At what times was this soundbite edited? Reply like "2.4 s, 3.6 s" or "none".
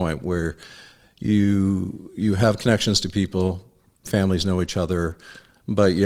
none